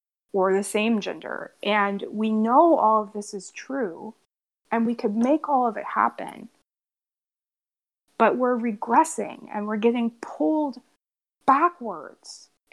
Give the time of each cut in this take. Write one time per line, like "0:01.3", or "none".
none